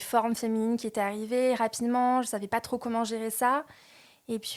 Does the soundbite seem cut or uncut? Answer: uncut